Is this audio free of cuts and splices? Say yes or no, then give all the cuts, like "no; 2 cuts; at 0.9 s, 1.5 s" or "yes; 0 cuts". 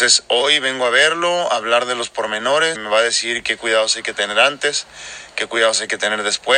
no; 1 cut; at 2.7 s